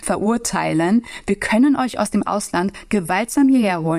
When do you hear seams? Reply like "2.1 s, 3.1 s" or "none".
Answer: none